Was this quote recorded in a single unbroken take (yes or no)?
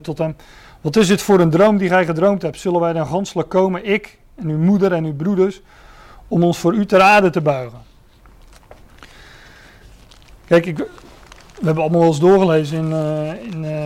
yes